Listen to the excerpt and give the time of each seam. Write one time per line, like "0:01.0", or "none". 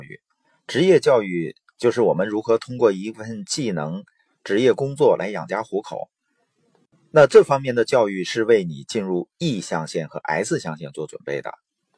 none